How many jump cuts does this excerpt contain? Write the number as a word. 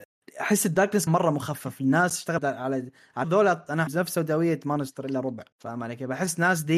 five